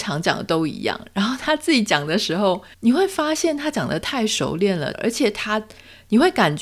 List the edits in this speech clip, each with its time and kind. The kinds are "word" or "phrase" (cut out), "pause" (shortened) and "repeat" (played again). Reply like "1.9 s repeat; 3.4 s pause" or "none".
2.7 s pause; 4.9 s phrase